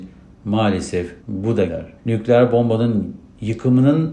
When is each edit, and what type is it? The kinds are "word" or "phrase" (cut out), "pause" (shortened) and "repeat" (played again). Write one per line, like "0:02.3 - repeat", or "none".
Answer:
0:01.2 - pause
0:01.7 - word
0:02.0 - pause